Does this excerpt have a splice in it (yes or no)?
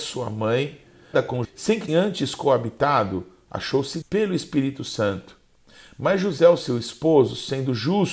yes